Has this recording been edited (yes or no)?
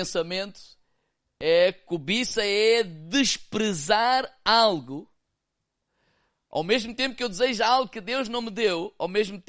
no